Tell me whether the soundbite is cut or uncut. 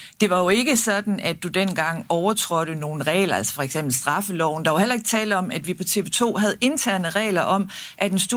uncut